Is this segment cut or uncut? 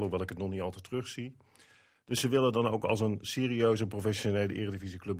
uncut